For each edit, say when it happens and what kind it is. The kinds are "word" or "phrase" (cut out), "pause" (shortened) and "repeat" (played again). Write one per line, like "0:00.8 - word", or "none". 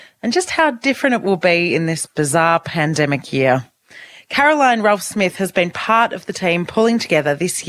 none

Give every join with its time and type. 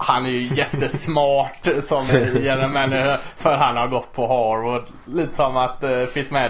0:02.1 - word

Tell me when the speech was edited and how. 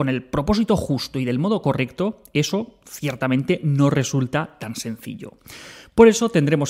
none

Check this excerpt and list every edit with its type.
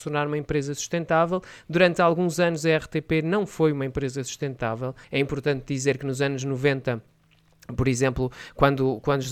0:05.0 - pause

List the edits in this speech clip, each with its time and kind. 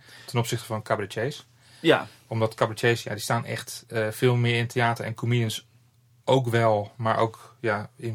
none

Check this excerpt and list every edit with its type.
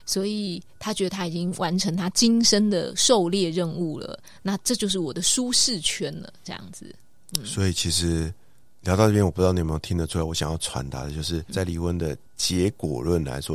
0:08.6 - pause
0:11.5 - word
0:12.3 - pause

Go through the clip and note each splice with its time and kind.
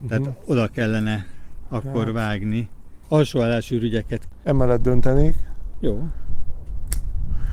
none

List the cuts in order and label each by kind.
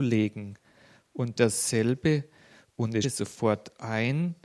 0:01.4 - phrase
0:03.0 - word

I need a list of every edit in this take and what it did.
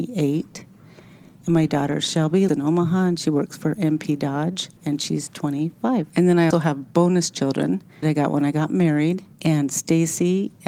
0:02.5 - word
0:04.8 - pause
0:06.1 - pause
0:06.5 - word
0:08.0 - word
0:09.3 - pause

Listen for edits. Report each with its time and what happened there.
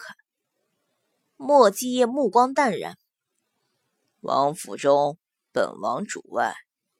none

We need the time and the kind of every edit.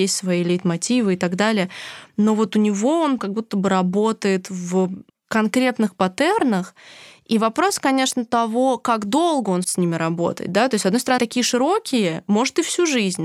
0:03.2 - word
0:05.1 - pause
0:09.6 - word
0:11.2 - word

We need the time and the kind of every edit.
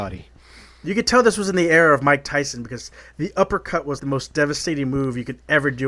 0:04.0 - word

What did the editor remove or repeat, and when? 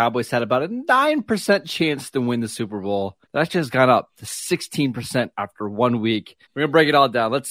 0:03.2 - pause
0:06.4 - pause

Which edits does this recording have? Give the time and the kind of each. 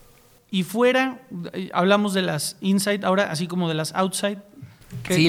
none

